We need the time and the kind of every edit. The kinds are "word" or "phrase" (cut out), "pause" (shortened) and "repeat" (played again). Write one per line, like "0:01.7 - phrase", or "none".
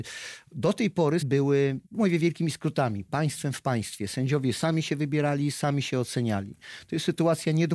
0:01.2 - word
0:01.9 - pause